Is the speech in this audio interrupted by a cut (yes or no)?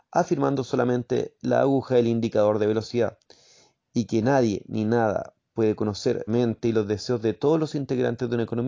yes